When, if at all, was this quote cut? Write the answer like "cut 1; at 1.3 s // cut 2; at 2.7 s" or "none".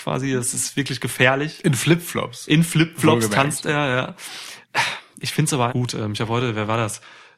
cut 1; at 4.6 s // cut 2; at 5.7 s